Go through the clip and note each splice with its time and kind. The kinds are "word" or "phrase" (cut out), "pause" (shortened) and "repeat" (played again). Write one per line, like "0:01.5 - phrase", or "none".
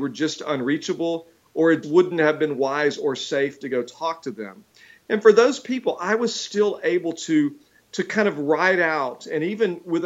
0:01.8 - word